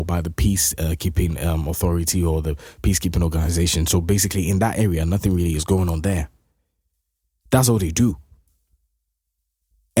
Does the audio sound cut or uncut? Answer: uncut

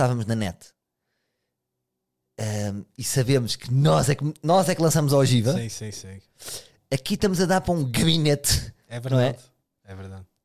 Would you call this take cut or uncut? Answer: uncut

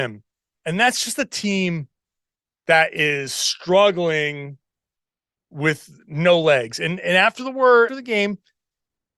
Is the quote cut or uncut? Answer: cut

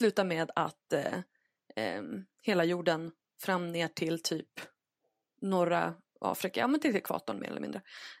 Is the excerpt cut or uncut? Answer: uncut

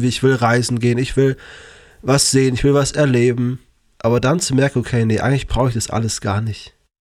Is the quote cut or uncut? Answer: uncut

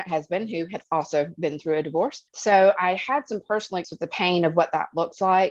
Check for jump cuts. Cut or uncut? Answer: cut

